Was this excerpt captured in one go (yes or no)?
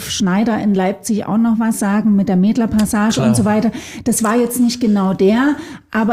yes